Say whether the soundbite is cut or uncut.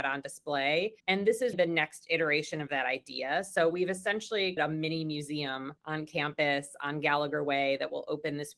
cut